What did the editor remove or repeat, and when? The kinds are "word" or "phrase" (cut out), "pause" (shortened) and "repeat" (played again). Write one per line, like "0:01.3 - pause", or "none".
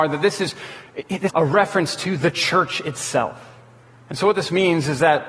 0:01.3 - word